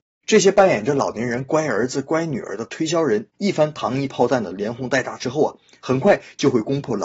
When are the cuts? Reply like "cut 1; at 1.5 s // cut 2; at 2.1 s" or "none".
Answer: none